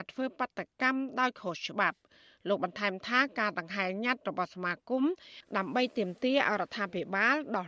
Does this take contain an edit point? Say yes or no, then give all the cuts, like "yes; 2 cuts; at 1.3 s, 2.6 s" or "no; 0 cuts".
no; 0 cuts